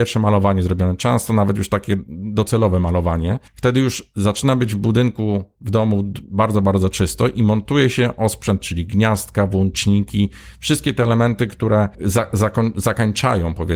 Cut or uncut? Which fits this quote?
cut